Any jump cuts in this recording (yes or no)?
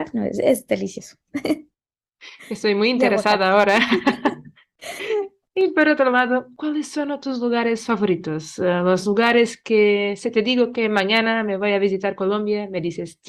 no